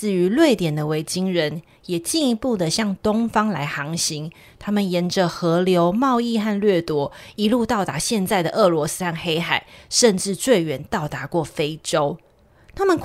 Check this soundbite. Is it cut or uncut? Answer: uncut